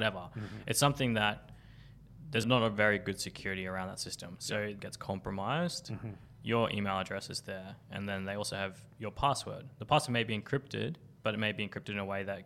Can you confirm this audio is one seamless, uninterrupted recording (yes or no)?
no